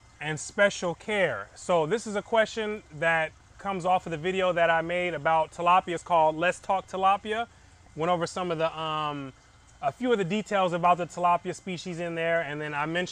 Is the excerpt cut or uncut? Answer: uncut